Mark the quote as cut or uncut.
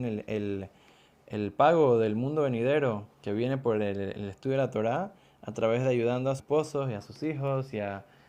cut